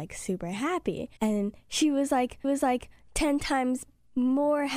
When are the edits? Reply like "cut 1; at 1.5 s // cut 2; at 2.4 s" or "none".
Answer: cut 1; at 1.2 s // cut 2; at 2.4 s